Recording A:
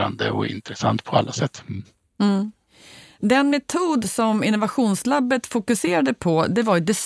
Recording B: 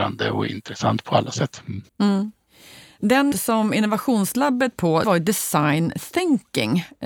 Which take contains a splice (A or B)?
B